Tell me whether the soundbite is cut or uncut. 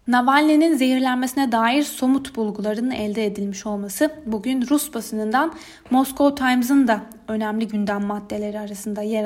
uncut